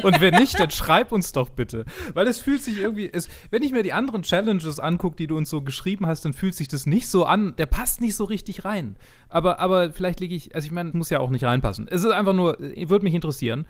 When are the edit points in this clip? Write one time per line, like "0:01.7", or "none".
0:10.9